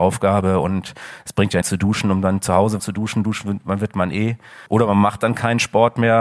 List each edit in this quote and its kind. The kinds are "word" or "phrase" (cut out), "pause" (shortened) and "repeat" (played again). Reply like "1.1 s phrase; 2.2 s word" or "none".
1.6 s phrase; 2.8 s word; 4.7 s pause